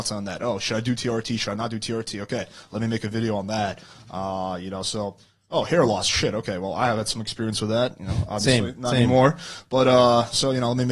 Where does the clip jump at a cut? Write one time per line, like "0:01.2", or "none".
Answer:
none